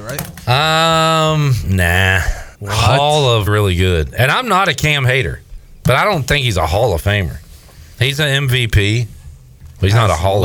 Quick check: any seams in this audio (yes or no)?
yes